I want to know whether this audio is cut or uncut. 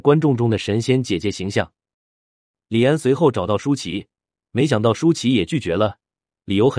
uncut